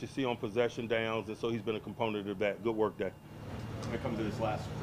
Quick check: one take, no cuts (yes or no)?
yes